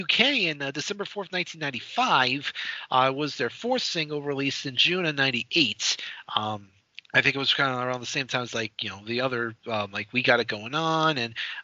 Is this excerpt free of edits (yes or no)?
no